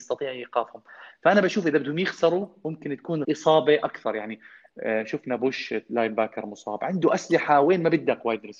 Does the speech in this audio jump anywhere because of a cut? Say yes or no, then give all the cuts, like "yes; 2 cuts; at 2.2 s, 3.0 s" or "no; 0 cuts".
yes; 1 cut; at 3.2 s